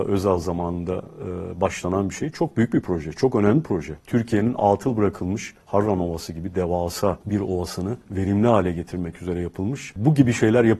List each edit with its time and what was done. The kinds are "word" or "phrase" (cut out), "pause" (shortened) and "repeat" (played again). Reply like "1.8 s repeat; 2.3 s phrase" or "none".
4.0 s pause; 5.6 s pause; 7.2 s pause; 8.0 s pause

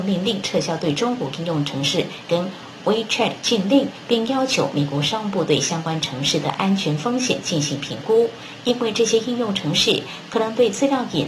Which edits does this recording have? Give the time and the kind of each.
2.3 s word

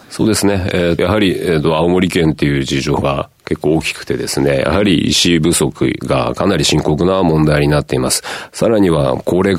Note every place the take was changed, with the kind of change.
1.0 s word

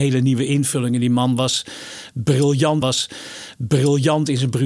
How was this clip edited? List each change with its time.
2.8 s repeat

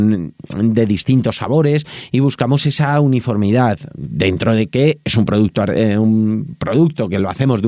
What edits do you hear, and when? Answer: none

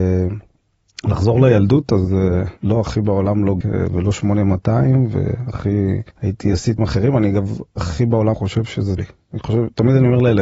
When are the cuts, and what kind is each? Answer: 2.6 s pause; 3.6 s word; 6.1 s pause; 6.8 s word; 8.3 s word; 9.0 s word

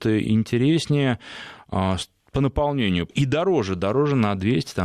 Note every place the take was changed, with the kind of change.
3.1 s word

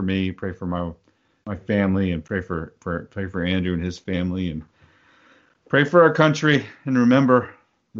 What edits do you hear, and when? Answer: none

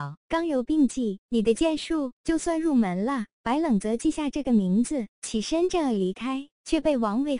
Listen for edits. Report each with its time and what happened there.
5.1 s phrase

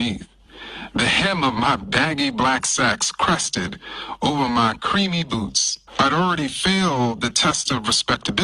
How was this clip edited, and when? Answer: 5.9 s pause

